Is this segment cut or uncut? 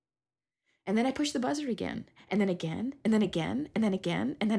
uncut